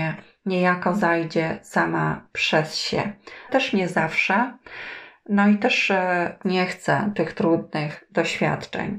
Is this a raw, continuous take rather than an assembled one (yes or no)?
no